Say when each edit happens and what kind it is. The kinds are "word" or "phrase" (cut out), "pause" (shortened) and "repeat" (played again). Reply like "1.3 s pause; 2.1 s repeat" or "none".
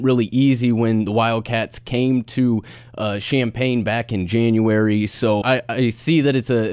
5.4 s word